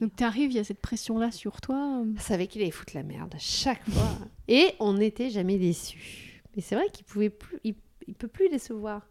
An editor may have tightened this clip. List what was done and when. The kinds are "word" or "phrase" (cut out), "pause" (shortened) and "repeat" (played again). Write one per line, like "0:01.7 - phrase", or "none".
0:02.2 - word